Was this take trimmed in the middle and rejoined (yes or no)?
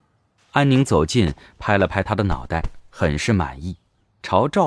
no